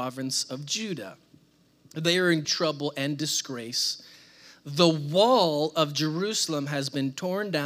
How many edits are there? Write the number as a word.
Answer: one